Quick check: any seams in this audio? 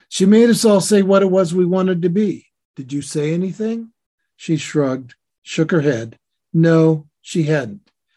no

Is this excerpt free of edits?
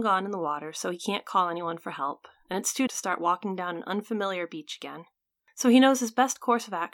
no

